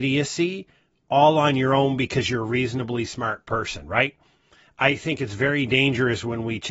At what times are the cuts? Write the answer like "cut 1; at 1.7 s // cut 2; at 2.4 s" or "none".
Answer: none